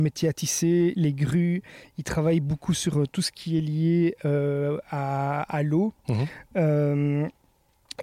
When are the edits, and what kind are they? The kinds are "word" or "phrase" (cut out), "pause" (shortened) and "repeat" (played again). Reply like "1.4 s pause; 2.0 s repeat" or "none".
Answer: none